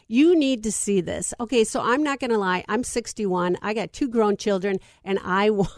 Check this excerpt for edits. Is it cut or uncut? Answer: uncut